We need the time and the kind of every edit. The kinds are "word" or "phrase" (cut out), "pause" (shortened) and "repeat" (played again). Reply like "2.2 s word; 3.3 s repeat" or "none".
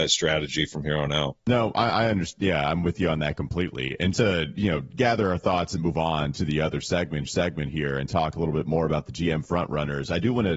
1.4 s pause; 4.1 s word; 5.8 s word; 7.3 s repeat

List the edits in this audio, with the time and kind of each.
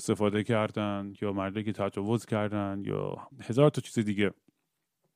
3.3 s pause

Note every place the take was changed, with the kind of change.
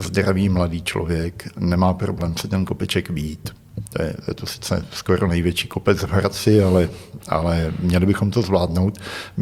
none

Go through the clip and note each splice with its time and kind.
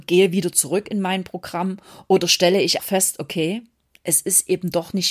2.8 s word

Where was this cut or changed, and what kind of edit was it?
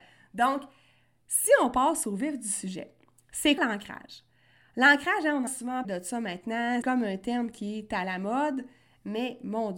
3.6 s word; 5.5 s word; 5.8 s word; 6.8 s word

